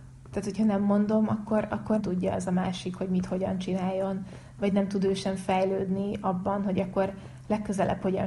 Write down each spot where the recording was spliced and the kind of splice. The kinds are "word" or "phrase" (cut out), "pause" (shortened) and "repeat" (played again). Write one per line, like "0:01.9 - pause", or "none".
0:02.0 - word